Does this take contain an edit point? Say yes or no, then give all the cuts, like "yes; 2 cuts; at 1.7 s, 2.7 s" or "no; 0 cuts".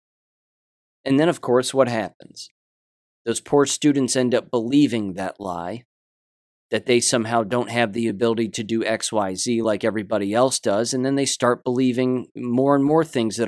no; 0 cuts